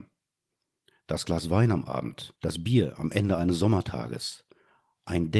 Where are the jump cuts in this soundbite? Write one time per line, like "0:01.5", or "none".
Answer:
0:02.4